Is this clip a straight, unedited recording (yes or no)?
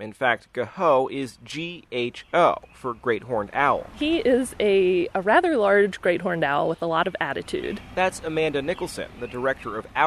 yes